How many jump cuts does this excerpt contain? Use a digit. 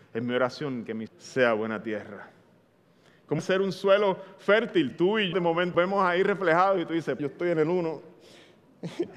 6